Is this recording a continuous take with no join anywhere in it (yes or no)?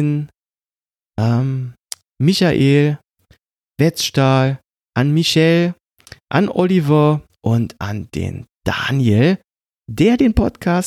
yes